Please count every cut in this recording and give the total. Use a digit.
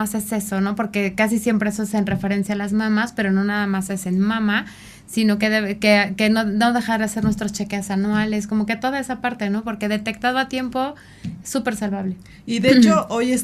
0